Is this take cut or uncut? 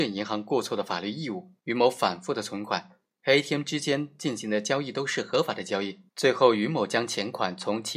cut